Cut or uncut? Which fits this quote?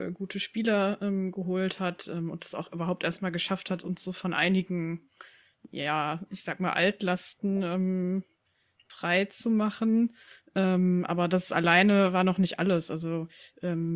uncut